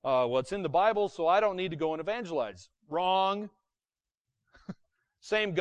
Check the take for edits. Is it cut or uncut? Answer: uncut